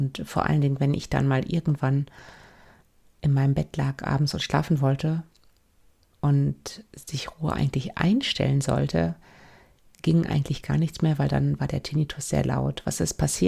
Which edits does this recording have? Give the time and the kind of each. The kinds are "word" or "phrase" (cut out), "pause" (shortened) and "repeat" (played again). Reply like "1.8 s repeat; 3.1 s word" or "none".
none

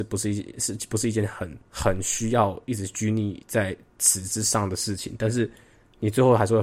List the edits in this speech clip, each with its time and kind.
1.6 s pause

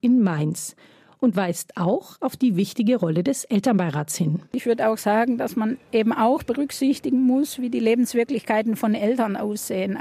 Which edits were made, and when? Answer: 4.5 s pause

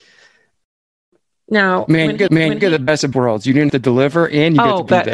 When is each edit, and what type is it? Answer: 2.3 s repeat; 3.1 s word; 3.7 s word

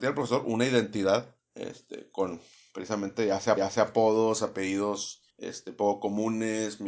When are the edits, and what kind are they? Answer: 1.4 s pause; 3.6 s repeat; 5.3 s pause

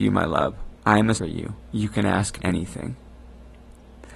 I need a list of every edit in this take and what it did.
1.1 s word; 2.4 s word

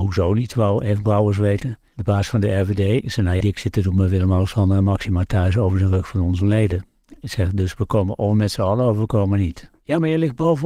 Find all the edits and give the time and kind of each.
3.4 s phrase

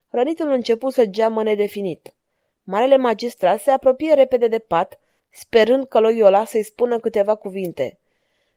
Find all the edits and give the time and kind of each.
none

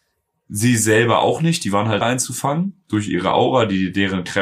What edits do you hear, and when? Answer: 2.0 s phrase

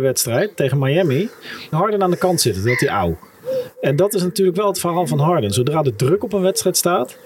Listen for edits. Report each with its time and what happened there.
1.7 s phrase

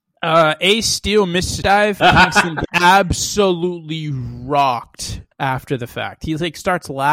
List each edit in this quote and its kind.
1.6 s word; 2.0 s phrase; 2.6 s word; 5.3 s pause

